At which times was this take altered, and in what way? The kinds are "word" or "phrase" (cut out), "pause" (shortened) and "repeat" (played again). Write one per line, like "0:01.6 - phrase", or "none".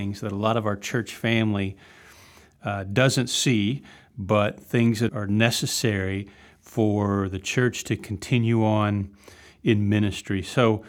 0:05.1 - word